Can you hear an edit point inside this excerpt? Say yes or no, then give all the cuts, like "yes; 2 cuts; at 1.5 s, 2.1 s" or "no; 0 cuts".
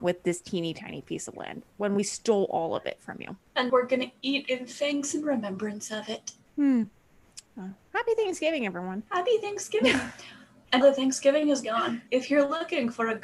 yes; 5 cuts; at 3.7 s, 7.5 s, 9.1 s, 10.8 s, 12.1 s